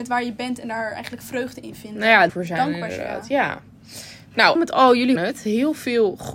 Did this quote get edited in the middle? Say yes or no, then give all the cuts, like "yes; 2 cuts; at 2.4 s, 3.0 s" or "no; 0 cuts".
yes; 4 cuts; at 1.2 s, 2.3 s, 4.6 s, 5.2 s